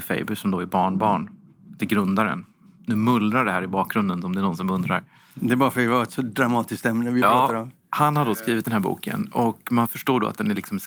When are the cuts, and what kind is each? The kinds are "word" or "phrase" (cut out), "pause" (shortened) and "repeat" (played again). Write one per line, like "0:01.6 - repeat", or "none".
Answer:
none